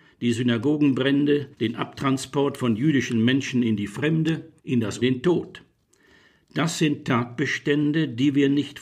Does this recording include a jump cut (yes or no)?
yes